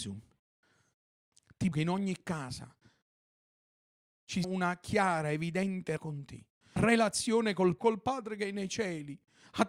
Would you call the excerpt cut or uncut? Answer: cut